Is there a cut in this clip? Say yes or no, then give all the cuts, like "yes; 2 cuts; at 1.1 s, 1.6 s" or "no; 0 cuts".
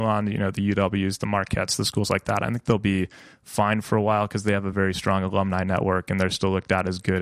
no; 0 cuts